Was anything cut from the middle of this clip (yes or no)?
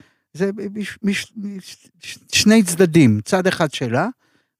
no